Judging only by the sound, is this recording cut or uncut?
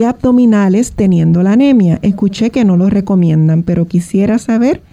uncut